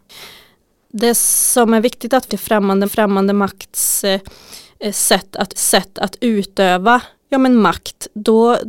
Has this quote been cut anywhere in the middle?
yes; 3 cuts; at 2.3 s, 2.8 s, 5.6 s

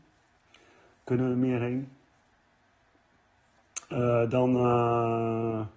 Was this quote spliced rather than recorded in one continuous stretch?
no; 0 cuts

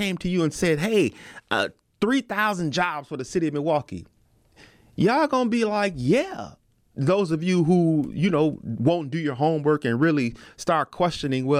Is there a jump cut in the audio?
no; 0 cuts

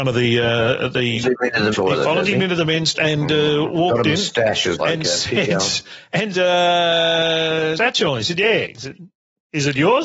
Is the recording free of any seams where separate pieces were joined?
no; 6 cuts; at 1.2 s, 1.7 s, 2.9 s, 4.8 s, 6.3 s, 7.8 s

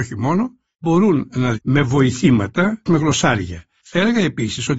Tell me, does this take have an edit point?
yes; 2 cuts; at 1.5 s, 2.9 s

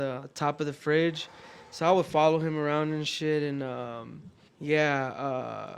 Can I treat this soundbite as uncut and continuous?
no; 1 cut; at 4.5 s

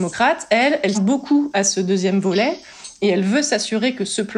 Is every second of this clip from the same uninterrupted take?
no; 1 cut; at 0.9 s

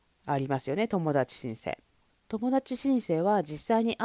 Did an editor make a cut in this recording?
yes; 1 cut; at 2.1 s

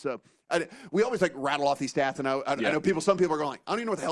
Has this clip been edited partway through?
no; 0 cuts

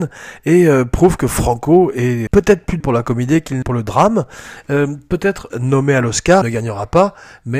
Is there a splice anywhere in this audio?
yes; 5 cuts; at 2.3 s, 2.8 s, 3.6 s, 5.5 s, 6.4 s

